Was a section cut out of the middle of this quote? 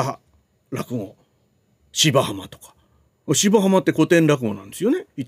no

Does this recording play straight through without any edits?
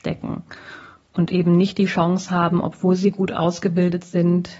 yes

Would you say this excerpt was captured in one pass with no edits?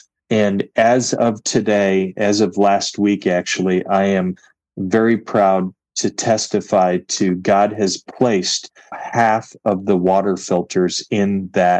no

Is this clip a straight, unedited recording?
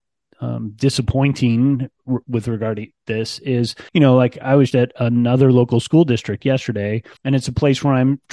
no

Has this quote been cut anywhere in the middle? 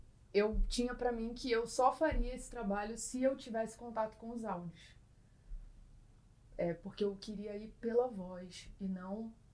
no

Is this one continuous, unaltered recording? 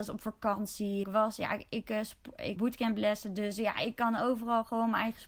no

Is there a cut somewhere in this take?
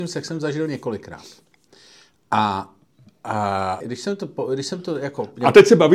yes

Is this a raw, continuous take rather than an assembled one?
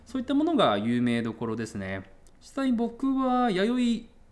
no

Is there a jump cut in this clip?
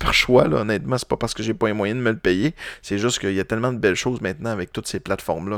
no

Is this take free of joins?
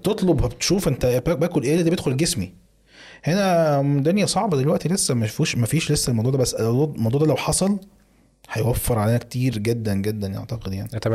yes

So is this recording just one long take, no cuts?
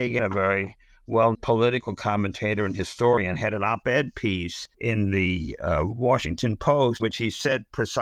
no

